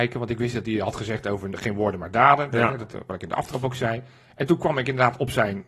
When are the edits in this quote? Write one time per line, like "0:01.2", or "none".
none